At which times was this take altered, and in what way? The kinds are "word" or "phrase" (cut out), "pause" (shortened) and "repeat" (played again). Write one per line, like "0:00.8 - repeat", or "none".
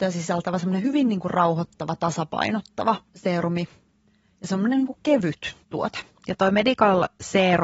0:03.1 - pause
0:05.6 - pause